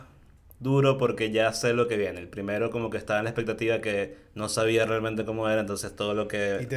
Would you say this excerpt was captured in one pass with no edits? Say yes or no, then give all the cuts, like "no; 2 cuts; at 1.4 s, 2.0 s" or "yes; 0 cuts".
yes; 0 cuts